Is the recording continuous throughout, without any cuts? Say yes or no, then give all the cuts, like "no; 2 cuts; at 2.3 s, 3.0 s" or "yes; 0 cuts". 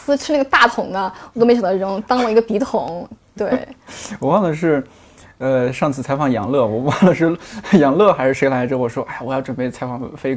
yes; 0 cuts